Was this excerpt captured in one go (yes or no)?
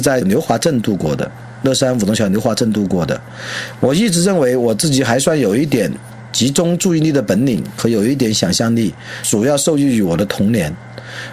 yes